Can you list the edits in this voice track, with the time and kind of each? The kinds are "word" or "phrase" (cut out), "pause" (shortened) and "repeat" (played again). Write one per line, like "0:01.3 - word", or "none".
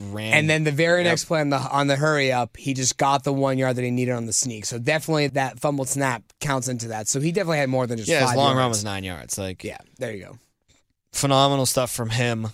0:05.3 - word